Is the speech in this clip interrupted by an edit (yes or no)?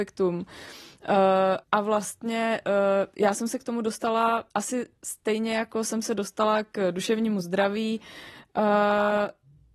yes